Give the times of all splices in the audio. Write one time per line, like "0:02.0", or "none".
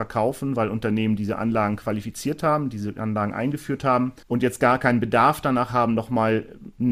0:04.2